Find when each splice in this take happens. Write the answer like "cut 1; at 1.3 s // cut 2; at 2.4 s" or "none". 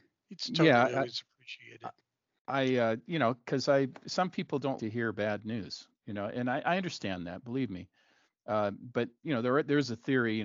cut 1; at 4.8 s